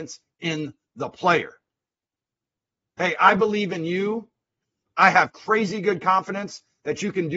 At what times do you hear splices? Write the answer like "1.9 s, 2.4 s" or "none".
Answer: none